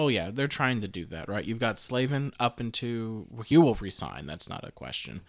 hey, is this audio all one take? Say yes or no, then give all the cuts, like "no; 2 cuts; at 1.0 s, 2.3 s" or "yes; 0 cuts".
yes; 0 cuts